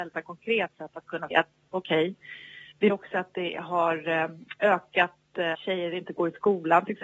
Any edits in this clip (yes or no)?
yes